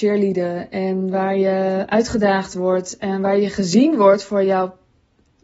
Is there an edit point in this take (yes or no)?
no